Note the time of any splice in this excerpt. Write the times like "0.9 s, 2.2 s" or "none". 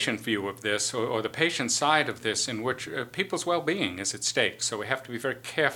none